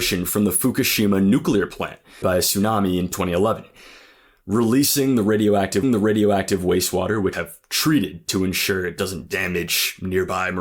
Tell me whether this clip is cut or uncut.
cut